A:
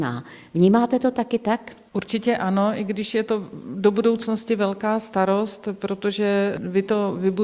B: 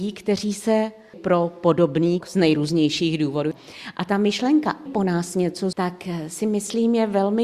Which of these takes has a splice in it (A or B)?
B